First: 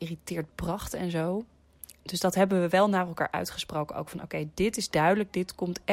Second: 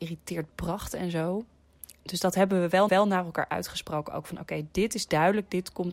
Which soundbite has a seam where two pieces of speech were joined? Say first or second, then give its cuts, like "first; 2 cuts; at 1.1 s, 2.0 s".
second; 1 cut; at 2.9 s